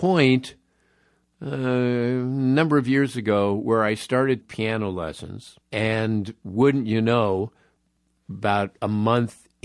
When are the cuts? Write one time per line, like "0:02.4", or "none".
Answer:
0:04.4
0:05.6